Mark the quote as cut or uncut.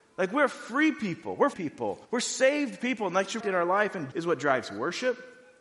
cut